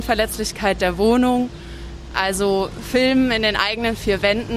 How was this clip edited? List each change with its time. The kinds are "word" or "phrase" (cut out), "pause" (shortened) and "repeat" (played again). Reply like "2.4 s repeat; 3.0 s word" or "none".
none